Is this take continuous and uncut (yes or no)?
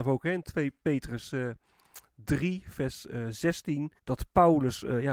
no